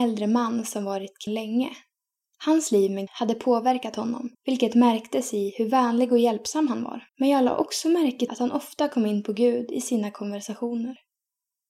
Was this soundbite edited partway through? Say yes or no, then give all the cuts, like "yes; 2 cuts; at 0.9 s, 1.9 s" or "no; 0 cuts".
yes; 5 cuts; at 1.3 s, 3.1 s, 4.3 s, 7.1 s, 8.3 s